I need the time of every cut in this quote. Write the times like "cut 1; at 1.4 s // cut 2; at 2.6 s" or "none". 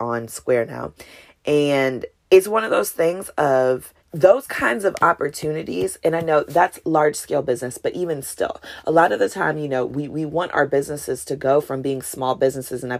cut 1; at 2.2 s // cut 2; at 4.0 s